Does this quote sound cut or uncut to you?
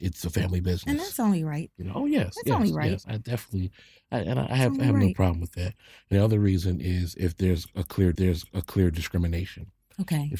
cut